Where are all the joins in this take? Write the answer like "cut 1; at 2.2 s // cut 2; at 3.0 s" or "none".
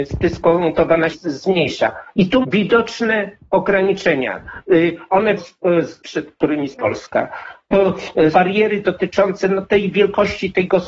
cut 1; at 1.1 s // cut 2; at 2.4 s // cut 3; at 5.4 s // cut 4; at 6.0 s // cut 5; at 6.7 s // cut 6; at 8.3 s